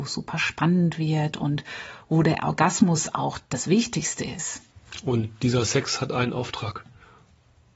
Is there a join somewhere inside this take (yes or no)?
no